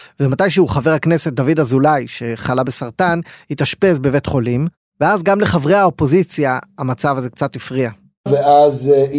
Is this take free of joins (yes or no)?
yes